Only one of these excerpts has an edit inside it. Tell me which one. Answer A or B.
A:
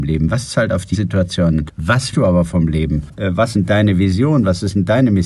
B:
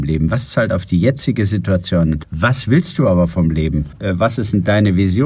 A